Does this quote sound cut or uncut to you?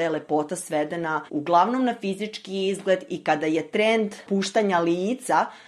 cut